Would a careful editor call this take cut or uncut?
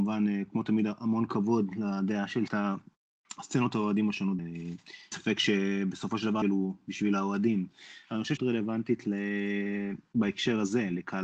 cut